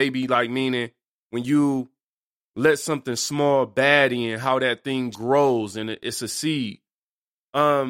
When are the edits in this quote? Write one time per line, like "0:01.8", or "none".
0:05.1